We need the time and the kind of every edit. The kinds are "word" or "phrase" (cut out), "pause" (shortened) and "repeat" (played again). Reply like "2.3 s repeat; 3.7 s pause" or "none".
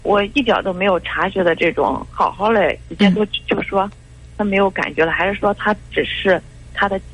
none